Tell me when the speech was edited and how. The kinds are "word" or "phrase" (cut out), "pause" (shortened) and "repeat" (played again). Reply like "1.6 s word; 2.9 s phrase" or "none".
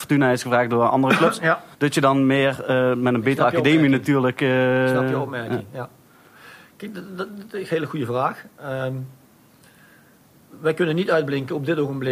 1.7 s pause